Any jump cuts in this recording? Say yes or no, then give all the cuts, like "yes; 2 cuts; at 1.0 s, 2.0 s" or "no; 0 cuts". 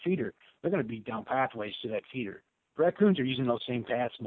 no; 0 cuts